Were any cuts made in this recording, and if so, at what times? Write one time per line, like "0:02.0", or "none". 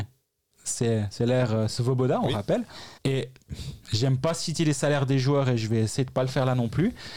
0:03.0

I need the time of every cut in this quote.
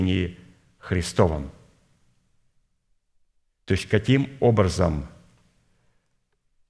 none

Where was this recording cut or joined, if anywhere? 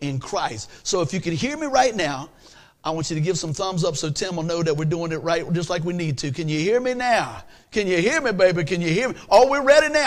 none

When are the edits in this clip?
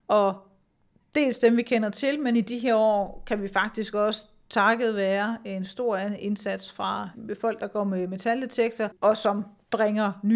0:09.0

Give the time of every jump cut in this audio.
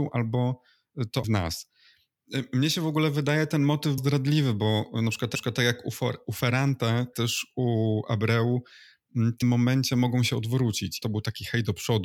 0:01.2
0:04.0
0:05.3
0:07.1
0:09.4
0:11.0

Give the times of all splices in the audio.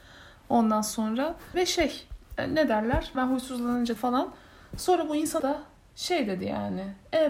0:01.5
0:03.1
0:04.0
0:05.4

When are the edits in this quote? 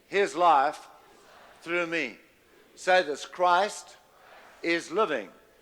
none

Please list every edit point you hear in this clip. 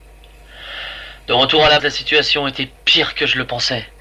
0:01.8

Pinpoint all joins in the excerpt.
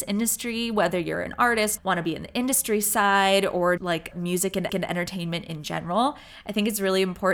0:01.8
0:03.8
0:04.1
0:04.7

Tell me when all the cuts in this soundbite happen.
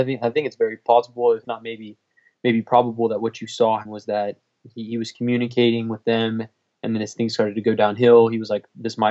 0:01.4
0:03.8

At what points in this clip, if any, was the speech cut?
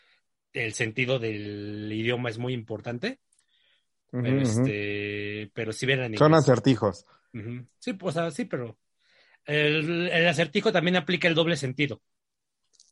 none

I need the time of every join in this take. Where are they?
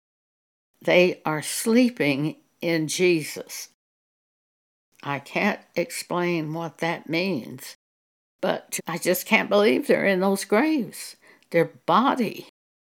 0:08.8

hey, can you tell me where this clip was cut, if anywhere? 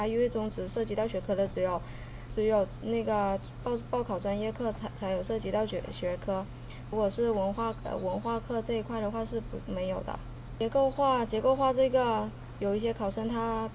0:02.3

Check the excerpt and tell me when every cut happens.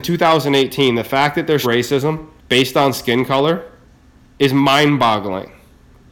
0:01.6
0:02.4
0:04.0

